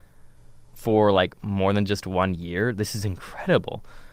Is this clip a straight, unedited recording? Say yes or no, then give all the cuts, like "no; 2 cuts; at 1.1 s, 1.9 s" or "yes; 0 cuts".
yes; 0 cuts